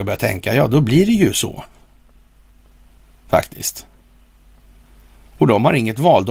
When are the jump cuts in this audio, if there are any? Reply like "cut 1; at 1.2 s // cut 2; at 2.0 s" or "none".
none